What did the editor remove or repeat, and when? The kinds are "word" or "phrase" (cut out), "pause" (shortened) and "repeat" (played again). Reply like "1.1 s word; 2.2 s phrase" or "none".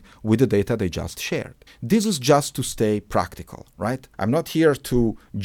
1.7 s pause; 4.1 s pause

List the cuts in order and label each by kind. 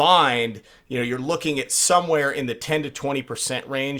none

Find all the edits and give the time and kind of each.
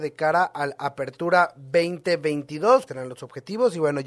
2.9 s word

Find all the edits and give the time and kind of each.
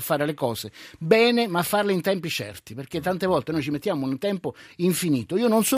none

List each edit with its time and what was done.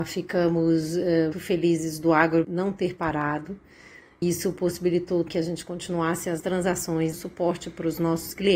1.3 s word; 2.4 s word; 4.2 s word; 5.3 s word; 6.4 s word; 7.1 s word

